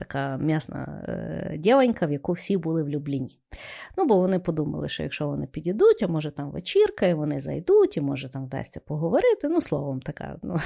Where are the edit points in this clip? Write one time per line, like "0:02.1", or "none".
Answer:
none